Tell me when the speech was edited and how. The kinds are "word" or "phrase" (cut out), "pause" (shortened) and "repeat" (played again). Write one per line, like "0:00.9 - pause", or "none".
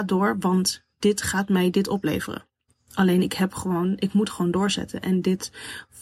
none